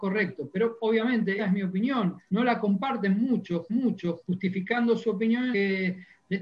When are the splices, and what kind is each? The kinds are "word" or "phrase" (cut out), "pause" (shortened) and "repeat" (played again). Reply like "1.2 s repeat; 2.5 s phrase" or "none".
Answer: 1.4 s word; 3.7 s repeat; 5.5 s word